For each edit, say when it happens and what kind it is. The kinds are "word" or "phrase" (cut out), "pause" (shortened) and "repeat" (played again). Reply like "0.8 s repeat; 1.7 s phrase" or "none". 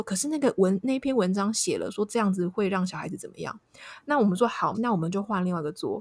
4.7 s phrase